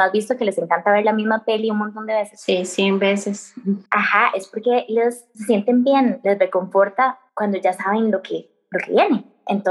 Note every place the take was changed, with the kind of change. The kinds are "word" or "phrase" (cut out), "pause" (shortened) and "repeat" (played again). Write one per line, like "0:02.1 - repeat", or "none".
0:03.9 - pause
0:07.3 - pause